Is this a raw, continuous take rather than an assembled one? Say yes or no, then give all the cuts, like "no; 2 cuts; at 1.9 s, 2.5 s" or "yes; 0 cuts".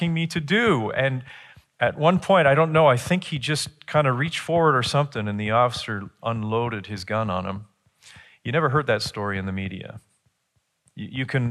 yes; 0 cuts